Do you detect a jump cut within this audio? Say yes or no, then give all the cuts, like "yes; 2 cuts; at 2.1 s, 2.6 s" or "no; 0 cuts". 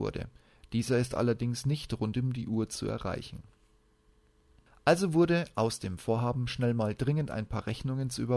no; 0 cuts